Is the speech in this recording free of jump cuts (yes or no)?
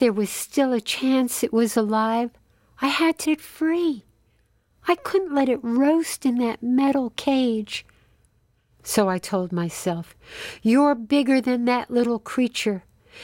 no